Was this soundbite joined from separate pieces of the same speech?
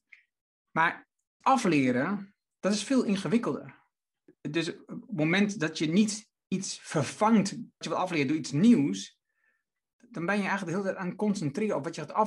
yes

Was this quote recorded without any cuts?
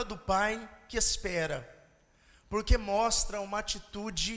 yes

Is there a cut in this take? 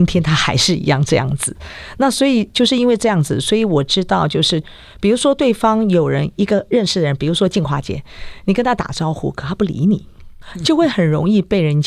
no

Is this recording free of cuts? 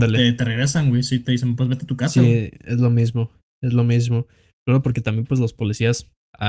yes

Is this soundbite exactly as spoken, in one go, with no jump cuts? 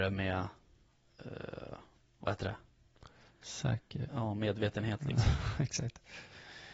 no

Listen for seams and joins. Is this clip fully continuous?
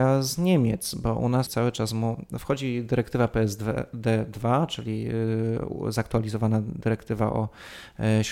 no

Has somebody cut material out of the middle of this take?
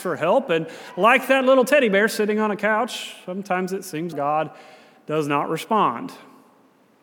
yes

